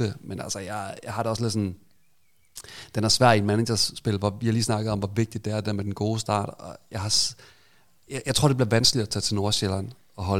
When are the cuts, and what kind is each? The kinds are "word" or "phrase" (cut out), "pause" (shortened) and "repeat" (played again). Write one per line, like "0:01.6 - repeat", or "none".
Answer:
none